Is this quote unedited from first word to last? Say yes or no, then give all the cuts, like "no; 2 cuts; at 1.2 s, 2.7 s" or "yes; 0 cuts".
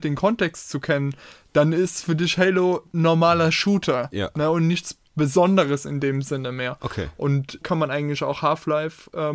no; 1 cut; at 7.6 s